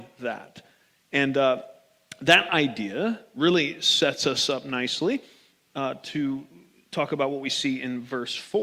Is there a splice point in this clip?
no; 0 cuts

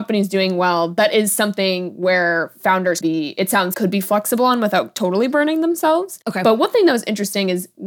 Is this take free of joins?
no; 2 cuts; at 3.0 s, 3.7 s

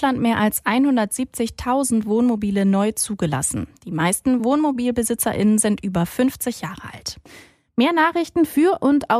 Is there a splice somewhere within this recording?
no; 0 cuts

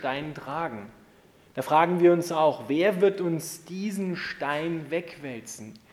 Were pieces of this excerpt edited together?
no; 0 cuts

